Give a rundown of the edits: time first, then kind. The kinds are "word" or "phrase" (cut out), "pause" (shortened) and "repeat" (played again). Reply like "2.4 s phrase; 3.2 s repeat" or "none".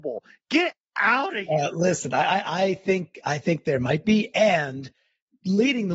none